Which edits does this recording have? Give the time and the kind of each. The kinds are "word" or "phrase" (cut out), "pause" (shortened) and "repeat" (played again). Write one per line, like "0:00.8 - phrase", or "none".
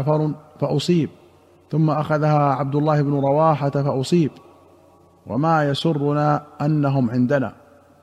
none